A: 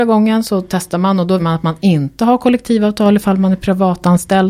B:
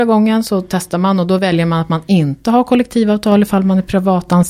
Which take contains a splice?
A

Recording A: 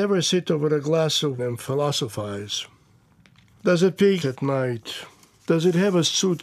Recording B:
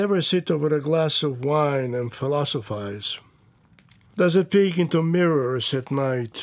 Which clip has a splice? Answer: A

